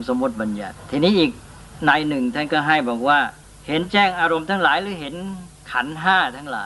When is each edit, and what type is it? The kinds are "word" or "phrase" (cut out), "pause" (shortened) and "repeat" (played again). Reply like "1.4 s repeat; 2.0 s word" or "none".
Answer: 3.4 s pause